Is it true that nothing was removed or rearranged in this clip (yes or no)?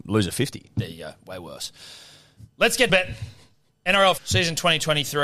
no